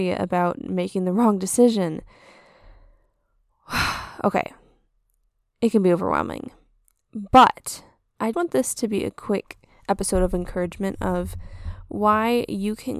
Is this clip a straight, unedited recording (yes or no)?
no